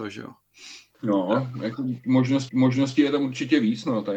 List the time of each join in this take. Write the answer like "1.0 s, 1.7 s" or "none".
2.5 s